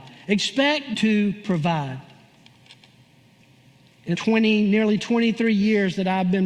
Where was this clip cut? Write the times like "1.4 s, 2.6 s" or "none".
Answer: 0.9 s, 4.1 s